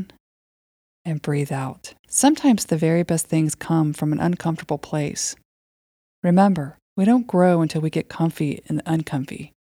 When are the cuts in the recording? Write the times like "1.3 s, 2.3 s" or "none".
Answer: 2.0 s, 6.8 s